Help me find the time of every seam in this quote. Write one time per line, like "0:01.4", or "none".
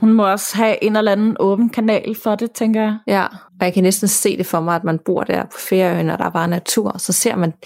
0:03.5

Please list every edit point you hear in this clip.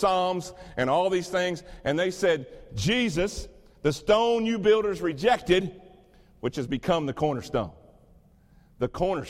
none

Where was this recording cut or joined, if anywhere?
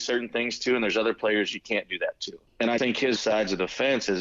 0:02.5
0:02.8
0:03.2

